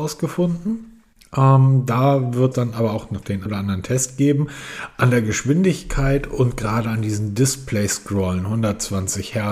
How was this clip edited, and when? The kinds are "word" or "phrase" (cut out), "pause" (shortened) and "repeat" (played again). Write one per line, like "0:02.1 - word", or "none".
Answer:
0:02.5 - word
0:03.5 - word